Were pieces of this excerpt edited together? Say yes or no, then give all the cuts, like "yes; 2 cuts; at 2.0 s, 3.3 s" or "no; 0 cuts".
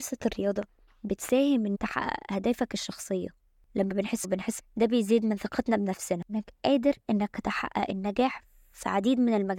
yes; 3 cuts; at 1.7 s, 4.2 s, 4.6 s